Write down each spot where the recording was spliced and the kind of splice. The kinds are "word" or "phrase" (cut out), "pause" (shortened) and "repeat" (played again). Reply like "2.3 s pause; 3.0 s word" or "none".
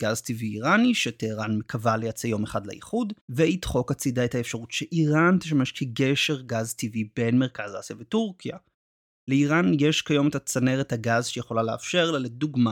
3.2 s pause